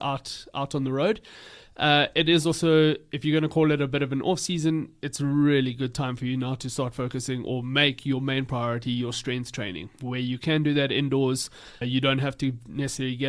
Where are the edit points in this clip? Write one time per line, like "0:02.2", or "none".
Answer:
0:11.8